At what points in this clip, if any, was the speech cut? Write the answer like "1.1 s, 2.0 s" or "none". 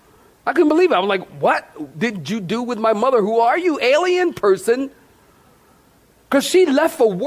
none